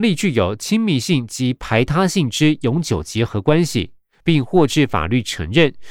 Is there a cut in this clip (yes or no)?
no